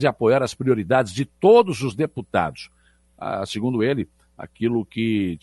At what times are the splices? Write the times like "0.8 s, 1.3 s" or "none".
none